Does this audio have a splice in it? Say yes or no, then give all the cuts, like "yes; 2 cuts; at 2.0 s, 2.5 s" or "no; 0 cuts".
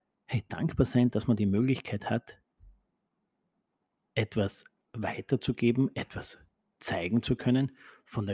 no; 0 cuts